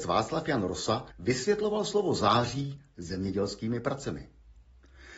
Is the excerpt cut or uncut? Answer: cut